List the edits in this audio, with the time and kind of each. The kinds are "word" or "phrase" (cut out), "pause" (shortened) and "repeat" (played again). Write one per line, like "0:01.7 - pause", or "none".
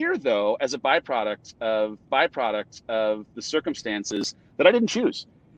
0:02.1 - repeat